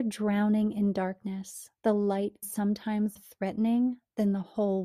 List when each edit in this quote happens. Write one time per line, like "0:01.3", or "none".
0:01.8
0:02.4
0:03.2